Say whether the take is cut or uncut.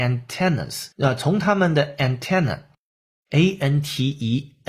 cut